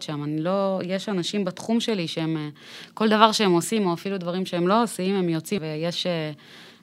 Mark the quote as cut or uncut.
cut